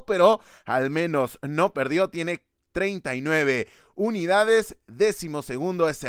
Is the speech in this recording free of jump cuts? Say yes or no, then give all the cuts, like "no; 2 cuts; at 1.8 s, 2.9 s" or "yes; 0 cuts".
yes; 0 cuts